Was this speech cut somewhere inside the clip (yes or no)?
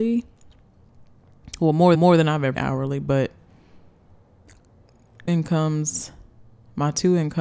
yes